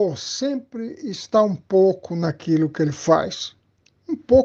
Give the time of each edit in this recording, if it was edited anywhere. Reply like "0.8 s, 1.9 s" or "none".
none